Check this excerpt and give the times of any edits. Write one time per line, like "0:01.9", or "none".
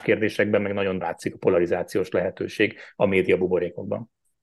0:01.0